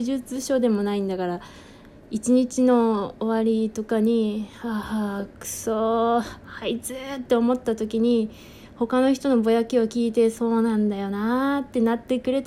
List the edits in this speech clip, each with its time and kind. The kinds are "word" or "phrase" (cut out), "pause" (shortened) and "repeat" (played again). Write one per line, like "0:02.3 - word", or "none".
none